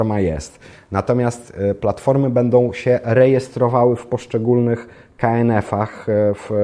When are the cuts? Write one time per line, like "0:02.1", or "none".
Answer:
none